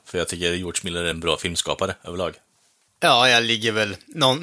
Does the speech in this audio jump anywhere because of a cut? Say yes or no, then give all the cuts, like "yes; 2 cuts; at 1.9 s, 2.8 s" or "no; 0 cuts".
no; 0 cuts